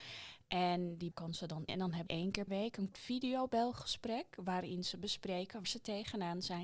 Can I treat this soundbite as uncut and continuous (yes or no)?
no